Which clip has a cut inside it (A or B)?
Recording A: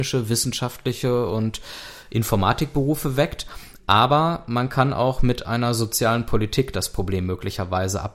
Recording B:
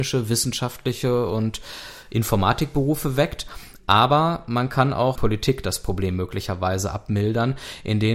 B